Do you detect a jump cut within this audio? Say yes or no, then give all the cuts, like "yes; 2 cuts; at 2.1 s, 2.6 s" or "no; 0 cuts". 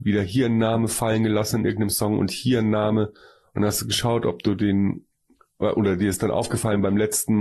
no; 0 cuts